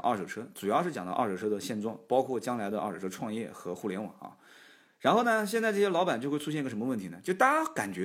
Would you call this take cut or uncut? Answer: uncut